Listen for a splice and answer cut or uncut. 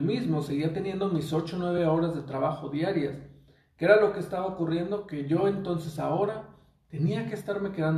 uncut